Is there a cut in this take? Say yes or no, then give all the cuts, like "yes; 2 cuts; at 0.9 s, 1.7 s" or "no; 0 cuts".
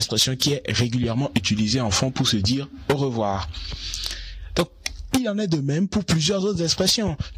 no; 0 cuts